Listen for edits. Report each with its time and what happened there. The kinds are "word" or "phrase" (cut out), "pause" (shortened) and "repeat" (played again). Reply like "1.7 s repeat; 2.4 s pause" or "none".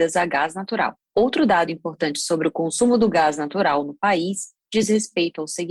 none